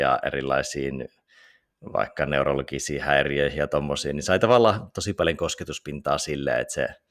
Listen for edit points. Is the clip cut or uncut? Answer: uncut